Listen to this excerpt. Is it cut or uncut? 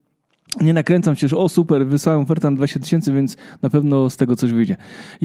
uncut